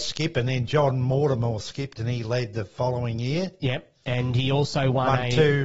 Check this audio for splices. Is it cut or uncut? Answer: uncut